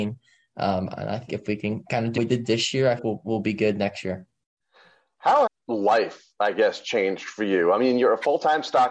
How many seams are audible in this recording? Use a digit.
4